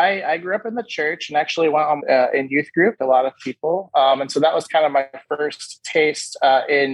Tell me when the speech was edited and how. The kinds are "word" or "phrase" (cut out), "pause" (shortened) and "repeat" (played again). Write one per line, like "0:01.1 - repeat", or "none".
0:02.0 - phrase
0:03.0 - word